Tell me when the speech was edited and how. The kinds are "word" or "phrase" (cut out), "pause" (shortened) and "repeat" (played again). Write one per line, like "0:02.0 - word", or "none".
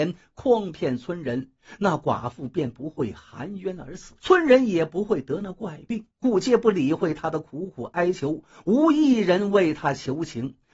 0:04.2 - pause
0:06.1 - pause